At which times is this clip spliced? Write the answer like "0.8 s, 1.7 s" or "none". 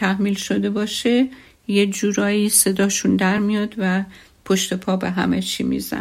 none